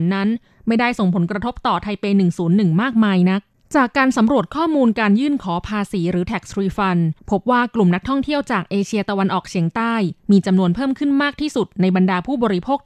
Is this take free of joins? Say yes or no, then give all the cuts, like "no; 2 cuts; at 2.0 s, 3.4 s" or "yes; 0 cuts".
no; 1 cut; at 7.2 s